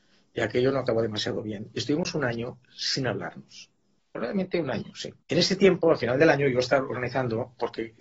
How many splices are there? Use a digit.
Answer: 2